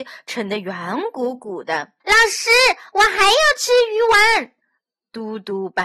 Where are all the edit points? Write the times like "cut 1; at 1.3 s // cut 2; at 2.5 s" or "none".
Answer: cut 1; at 2.0 s